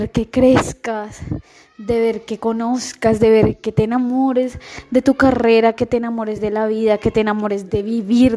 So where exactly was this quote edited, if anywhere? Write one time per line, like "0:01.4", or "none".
none